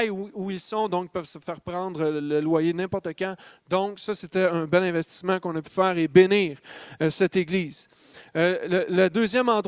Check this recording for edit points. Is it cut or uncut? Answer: uncut